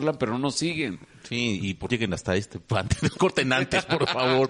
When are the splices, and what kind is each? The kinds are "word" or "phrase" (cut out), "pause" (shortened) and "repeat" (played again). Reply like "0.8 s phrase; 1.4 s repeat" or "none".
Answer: 1.9 s word; 3.2 s phrase